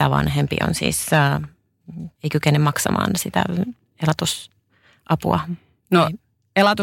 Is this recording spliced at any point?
yes; 1 cut; at 2.1 s

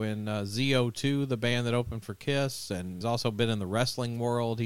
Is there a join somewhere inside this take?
yes; 1 cut; at 3.0 s

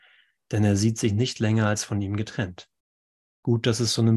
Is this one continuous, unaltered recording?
no; 1 cut; at 3.0 s

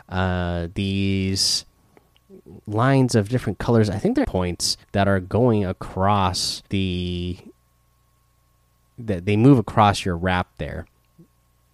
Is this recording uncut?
no; 4 cuts; at 2.6 s, 4.2 s, 4.8 s, 6.7 s

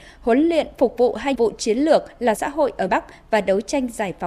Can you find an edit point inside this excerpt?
yes; 3 cuts; at 1.3 s, 2.4 s, 2.9 s

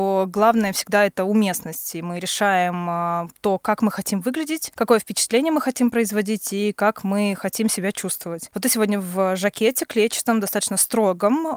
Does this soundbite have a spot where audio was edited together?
no; 0 cuts

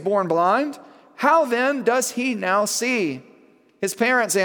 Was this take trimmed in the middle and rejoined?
no; 0 cuts

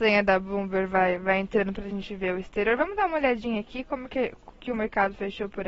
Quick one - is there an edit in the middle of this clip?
no; 0 cuts

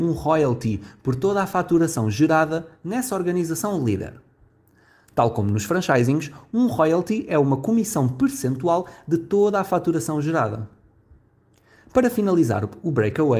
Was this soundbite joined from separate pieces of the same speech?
no; 0 cuts

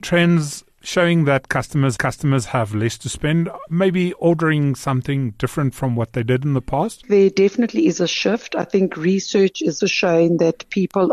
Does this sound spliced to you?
yes; 2 cuts; at 2.0 s, 9.8 s

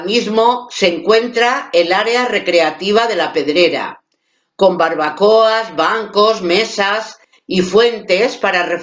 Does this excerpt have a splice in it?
no; 0 cuts

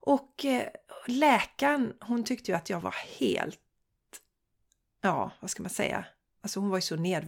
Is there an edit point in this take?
no; 0 cuts

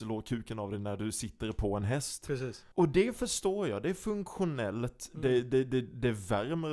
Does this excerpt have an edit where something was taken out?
yes; 1 cut; at 2.7 s

